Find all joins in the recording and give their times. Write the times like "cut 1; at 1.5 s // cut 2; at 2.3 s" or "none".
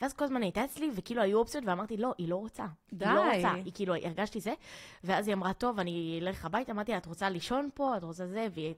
none